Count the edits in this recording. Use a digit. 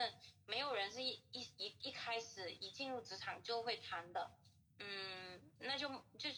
0